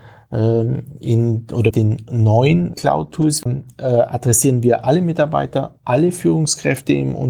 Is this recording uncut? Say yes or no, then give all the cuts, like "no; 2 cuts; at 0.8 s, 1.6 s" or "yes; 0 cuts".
no; 3 cuts; at 1.7 s, 2.7 s, 3.5 s